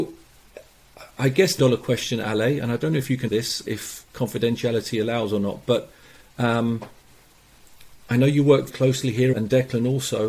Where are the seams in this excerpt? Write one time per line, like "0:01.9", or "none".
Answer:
0:01.6
0:03.3
0:03.7
0:08.7
0:09.3